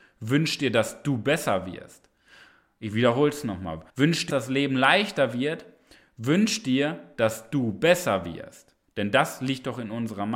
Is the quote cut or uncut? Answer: cut